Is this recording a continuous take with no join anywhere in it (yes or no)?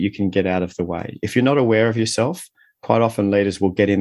yes